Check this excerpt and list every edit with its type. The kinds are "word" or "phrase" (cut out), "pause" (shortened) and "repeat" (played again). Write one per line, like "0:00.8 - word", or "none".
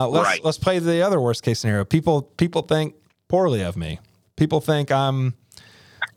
none